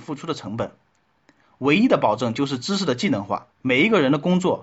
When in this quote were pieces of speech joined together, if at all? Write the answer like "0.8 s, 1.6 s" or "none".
3.5 s